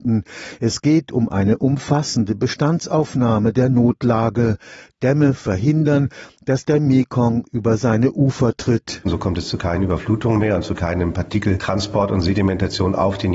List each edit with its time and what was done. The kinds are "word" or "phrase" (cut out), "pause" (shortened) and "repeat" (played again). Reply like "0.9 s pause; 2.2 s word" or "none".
none